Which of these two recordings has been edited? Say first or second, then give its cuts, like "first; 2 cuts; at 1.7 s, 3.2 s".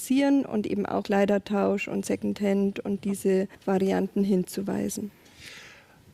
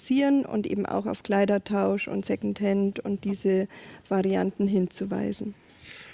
first; 2 cuts; at 1.0 s, 3.5 s